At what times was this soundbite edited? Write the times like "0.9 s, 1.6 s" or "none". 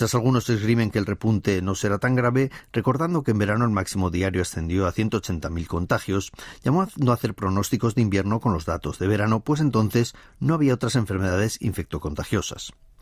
none